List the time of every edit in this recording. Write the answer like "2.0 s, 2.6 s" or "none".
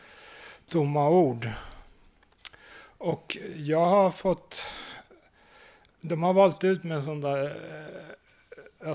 none